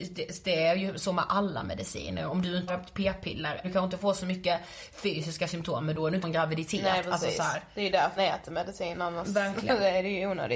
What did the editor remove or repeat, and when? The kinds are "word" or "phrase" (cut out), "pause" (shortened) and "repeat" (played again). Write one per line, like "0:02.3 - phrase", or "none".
0:02.7 - word
0:03.6 - word
0:06.2 - word
0:08.2 - word